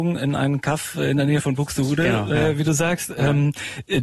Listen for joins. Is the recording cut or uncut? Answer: uncut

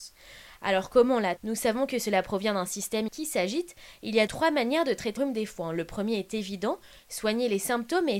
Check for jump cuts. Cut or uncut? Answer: cut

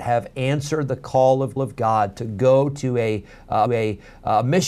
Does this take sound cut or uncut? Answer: cut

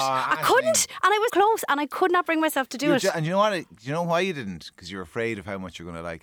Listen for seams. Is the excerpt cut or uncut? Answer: cut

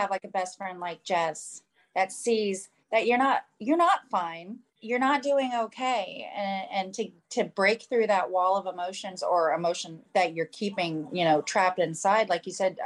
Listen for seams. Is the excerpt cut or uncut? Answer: uncut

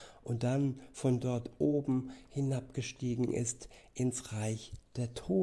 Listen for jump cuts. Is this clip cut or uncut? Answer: uncut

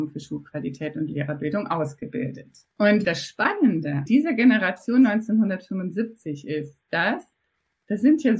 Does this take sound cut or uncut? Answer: cut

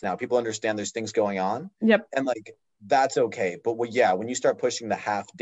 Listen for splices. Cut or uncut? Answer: uncut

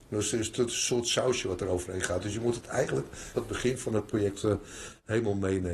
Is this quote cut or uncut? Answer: cut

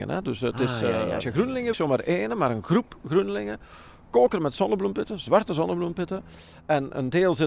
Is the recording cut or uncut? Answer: cut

